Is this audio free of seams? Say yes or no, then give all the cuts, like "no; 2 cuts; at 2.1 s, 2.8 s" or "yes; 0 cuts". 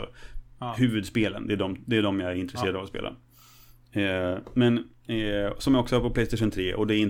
yes; 0 cuts